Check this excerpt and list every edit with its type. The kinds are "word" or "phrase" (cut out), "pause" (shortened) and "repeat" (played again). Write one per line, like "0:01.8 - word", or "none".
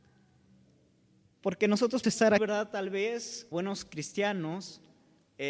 0:02.0 - word
0:02.4 - word
0:03.5 - word